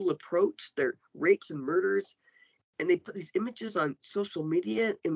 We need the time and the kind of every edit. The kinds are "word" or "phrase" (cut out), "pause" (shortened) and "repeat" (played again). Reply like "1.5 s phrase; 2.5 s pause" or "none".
none